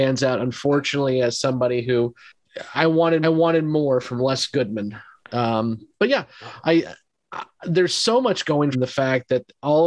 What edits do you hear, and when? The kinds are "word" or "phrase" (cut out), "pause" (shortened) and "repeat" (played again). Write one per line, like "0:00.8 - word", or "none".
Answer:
0:02.7 - word
0:03.2 - repeat
0:08.7 - phrase